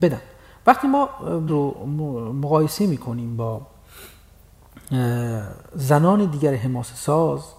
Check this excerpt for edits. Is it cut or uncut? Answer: cut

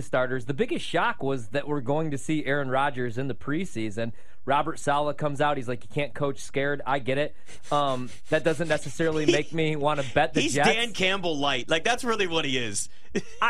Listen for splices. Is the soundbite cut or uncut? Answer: uncut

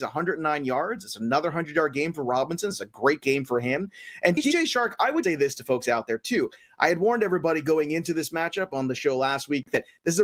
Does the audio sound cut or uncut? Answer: cut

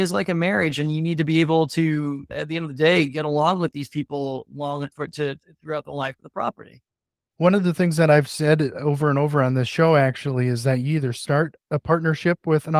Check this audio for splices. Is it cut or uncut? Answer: uncut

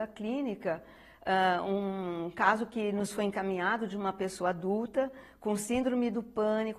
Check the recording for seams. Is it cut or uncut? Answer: uncut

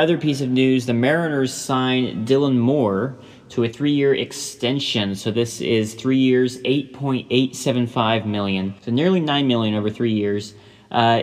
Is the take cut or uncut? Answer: cut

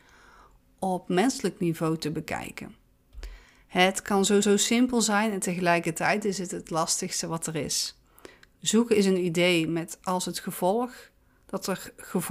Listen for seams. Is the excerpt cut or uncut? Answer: cut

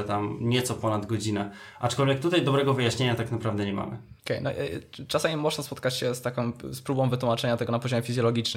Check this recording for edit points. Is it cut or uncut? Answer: cut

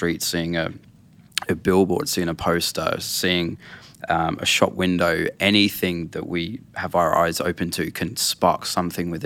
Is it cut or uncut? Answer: uncut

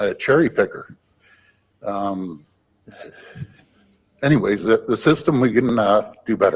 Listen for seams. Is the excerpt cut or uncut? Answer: uncut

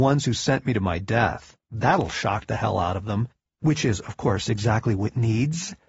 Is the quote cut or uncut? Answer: cut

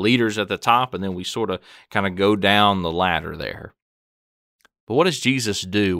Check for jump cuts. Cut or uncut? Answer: uncut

